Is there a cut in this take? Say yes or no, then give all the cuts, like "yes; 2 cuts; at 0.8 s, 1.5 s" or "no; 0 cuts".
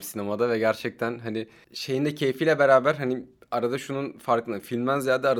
no; 0 cuts